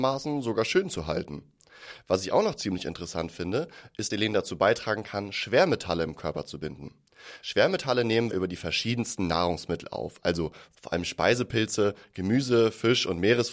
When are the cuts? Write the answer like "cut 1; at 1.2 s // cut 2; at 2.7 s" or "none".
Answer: cut 1; at 4.1 s // cut 2; at 8.3 s